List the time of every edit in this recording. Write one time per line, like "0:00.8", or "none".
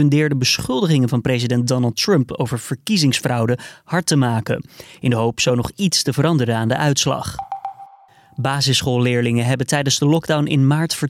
none